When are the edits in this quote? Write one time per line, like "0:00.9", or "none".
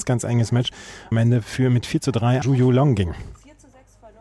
0:01.1
0:02.4